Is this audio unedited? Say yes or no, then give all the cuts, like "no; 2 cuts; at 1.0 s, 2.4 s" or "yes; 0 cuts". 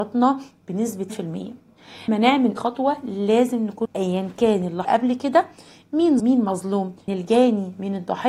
no; 7 cuts; at 1.1 s, 2.1 s, 2.6 s, 3.9 s, 4.8 s, 6.2 s, 7.1 s